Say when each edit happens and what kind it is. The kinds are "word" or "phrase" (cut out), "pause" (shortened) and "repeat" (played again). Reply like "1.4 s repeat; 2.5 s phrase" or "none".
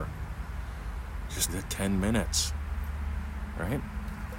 1.5 s word